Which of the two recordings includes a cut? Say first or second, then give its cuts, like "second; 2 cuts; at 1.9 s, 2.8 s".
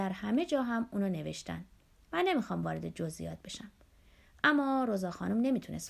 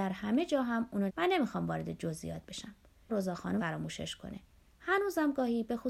second; 3 cuts; at 1.1 s, 3.1 s, 3.6 s